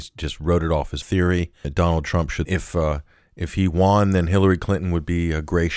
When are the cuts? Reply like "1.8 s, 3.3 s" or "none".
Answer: 1.0 s, 1.6 s, 2.4 s